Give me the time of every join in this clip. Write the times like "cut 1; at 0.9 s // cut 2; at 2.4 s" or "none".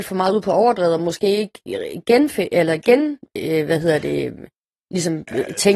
none